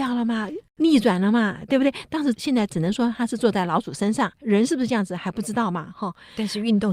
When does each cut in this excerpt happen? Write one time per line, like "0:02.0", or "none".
0:04.4